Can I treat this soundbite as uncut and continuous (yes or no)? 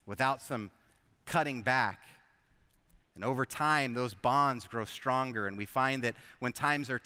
yes